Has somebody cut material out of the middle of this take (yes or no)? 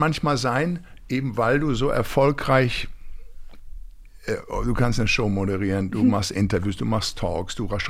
no